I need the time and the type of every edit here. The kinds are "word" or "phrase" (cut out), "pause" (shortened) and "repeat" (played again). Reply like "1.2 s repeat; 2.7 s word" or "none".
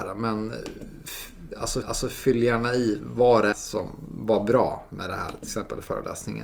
1.8 s repeat; 3.5 s word